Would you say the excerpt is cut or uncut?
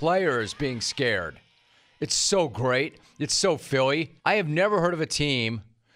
cut